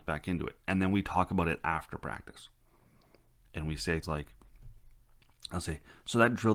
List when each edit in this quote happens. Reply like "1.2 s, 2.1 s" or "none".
4.0 s